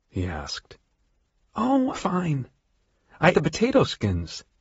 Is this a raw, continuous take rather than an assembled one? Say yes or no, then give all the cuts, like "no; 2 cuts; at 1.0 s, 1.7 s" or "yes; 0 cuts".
no; 2 cuts; at 1.9 s, 3.3 s